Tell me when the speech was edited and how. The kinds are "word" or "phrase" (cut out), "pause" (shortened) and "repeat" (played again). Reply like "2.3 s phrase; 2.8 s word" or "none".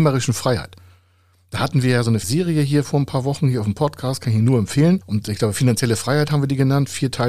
2.2 s word